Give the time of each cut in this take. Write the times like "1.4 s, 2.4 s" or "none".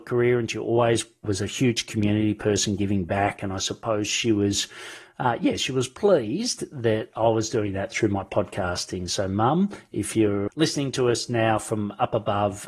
1.2 s, 10.5 s